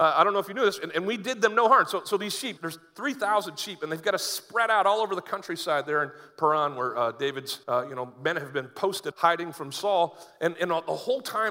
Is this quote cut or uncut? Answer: cut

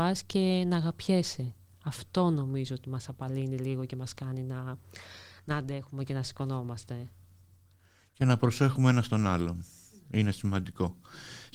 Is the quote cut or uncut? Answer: uncut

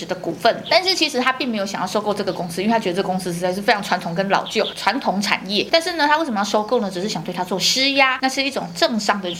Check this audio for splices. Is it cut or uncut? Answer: uncut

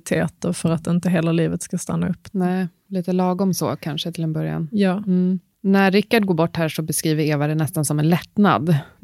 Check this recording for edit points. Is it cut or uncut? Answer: cut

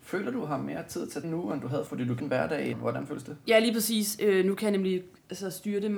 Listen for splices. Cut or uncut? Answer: cut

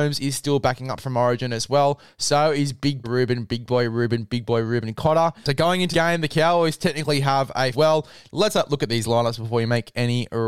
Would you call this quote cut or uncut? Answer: cut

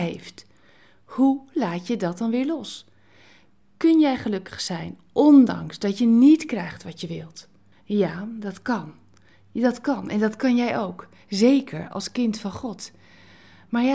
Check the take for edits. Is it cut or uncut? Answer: cut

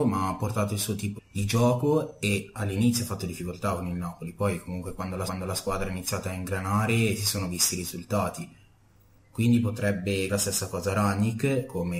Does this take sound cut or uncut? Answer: cut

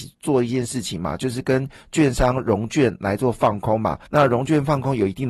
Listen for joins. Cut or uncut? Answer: cut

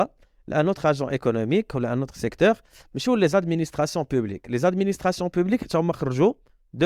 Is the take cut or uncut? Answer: uncut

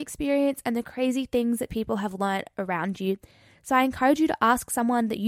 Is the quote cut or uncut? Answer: uncut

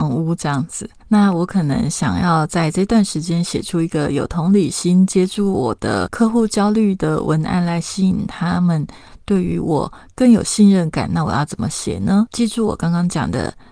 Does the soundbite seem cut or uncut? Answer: uncut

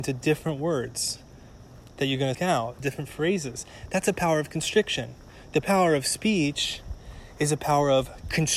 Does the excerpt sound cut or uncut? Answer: cut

